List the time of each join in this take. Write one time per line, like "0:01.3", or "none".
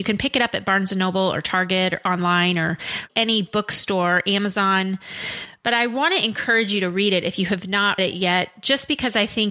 0:03.1
0:08.0